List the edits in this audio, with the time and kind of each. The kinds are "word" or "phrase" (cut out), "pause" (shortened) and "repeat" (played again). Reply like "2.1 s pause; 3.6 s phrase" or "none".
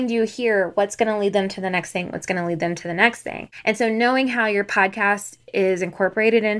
none